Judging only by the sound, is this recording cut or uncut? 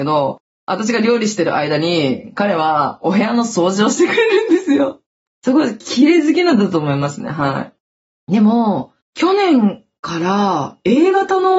uncut